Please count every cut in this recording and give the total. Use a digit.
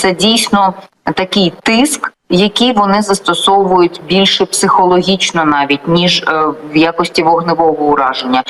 0